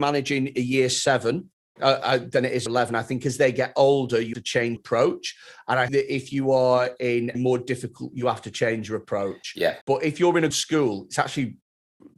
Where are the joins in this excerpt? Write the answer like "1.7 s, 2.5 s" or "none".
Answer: 1.8 s, 2.7 s, 4.3 s, 4.8 s, 5.9 s, 7.3 s, 8.1 s, 9.8 s, 10.5 s

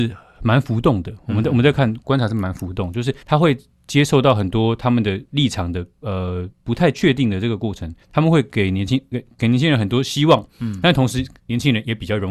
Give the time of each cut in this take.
3.2 s, 6.5 s, 8.0 s

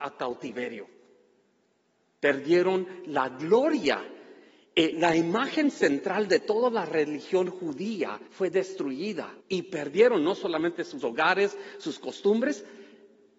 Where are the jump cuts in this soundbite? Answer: 4.9 s, 8.3 s, 9.4 s, 11.0 s

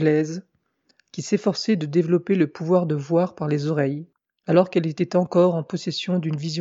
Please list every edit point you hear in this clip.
4.2 s

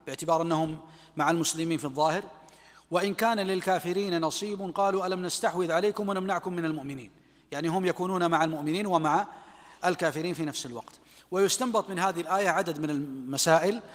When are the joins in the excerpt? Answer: none

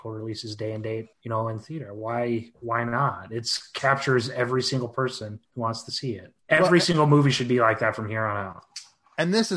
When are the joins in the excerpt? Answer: 1.1 s, 5.4 s, 6.4 s

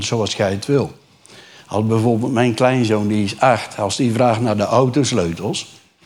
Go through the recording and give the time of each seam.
none

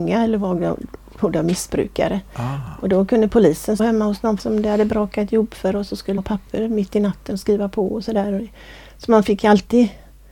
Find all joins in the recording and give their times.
3.8 s, 4.4 s, 6.2 s

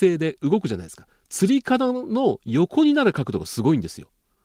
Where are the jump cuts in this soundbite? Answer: none

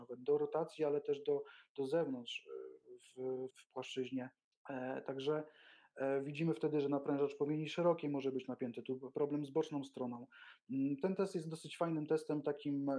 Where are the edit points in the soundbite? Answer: 3.5 s, 4.5 s

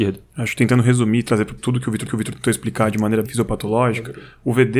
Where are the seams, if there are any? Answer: 1.6 s, 2.1 s, 3.2 s

